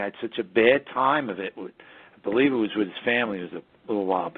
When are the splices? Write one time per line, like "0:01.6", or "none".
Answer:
none